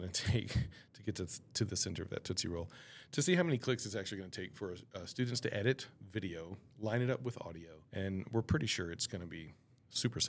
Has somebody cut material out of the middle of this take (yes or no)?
yes